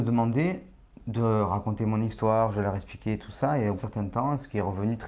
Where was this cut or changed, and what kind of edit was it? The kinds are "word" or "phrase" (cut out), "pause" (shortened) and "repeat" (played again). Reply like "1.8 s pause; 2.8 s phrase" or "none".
3.8 s phrase